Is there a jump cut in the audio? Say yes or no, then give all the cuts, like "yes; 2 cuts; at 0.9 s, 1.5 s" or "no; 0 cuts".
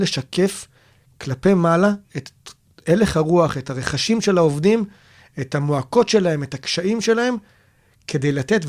no; 0 cuts